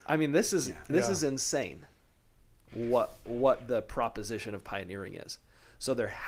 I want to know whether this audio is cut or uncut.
uncut